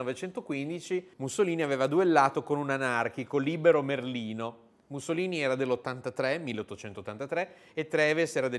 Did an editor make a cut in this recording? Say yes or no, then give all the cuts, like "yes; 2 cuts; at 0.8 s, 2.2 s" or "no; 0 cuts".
yes; 1 cut; at 1.1 s